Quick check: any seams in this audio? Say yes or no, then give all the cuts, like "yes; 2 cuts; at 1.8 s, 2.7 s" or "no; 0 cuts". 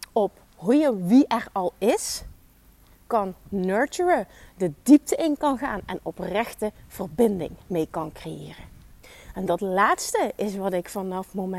no; 0 cuts